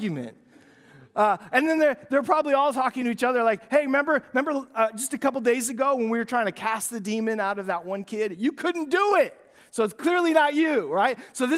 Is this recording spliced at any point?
no; 0 cuts

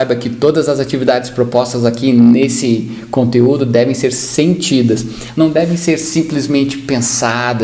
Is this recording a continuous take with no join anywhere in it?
yes; 0 cuts

